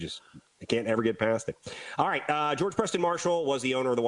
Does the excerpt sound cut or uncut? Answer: uncut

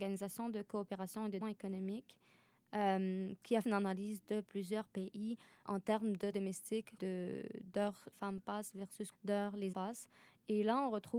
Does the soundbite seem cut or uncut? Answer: cut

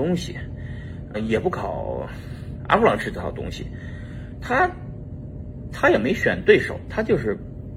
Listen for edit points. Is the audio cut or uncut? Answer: cut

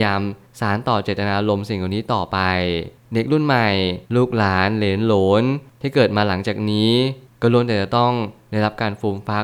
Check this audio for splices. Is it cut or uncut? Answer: cut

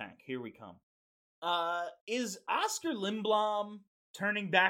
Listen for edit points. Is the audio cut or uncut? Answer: uncut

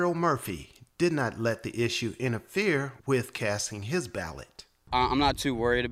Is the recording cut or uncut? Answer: cut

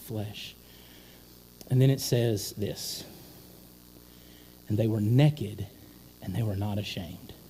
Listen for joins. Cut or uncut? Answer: uncut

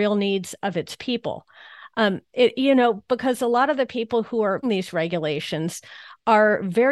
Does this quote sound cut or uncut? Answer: cut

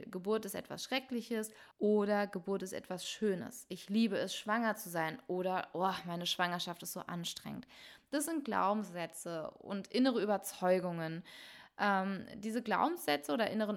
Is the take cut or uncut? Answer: cut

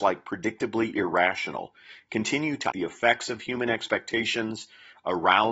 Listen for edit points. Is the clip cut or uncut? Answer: cut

